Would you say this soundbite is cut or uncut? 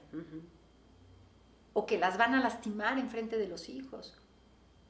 uncut